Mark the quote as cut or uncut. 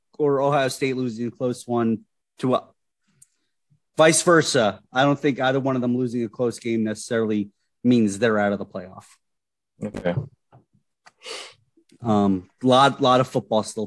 uncut